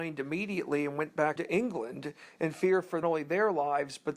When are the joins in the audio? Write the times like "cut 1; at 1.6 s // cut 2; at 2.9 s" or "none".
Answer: cut 1; at 1.4 s // cut 2; at 3.0 s